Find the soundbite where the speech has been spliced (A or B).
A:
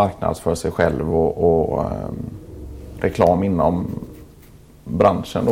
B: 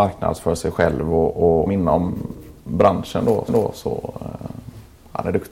B